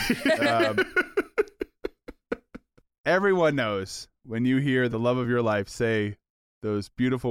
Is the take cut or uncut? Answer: uncut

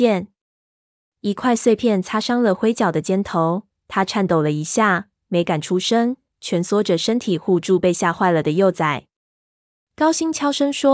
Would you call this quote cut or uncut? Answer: uncut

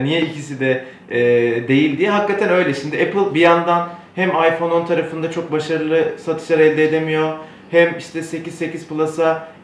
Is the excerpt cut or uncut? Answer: uncut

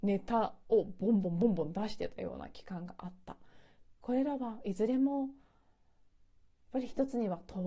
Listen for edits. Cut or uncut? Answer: uncut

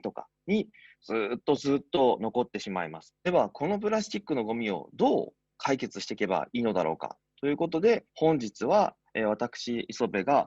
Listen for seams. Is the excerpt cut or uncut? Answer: cut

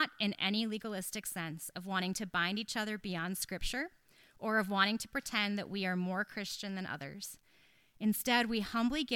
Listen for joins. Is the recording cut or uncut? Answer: uncut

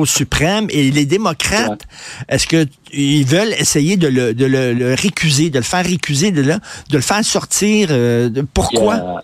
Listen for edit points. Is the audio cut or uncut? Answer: uncut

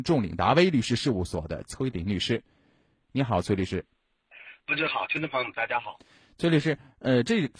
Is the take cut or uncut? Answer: uncut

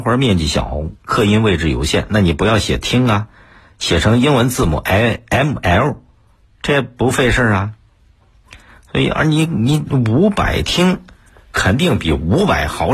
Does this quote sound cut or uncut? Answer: uncut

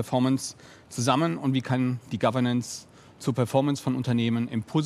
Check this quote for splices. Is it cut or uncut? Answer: uncut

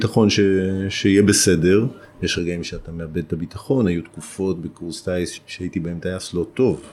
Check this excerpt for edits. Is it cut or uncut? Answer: uncut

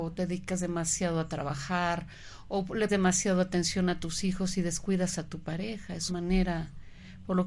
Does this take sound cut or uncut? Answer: cut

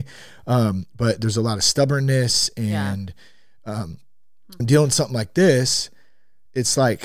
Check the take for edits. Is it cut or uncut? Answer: cut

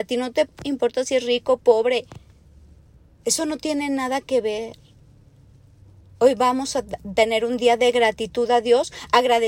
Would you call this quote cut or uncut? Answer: uncut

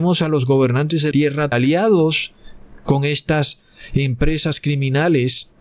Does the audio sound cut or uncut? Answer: cut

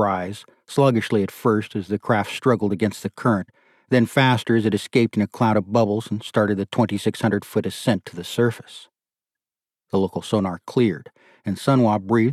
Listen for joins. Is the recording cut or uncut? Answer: uncut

